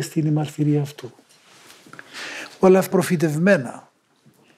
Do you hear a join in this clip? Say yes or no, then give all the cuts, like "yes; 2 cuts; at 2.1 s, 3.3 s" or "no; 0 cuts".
yes; 1 cut; at 2.9 s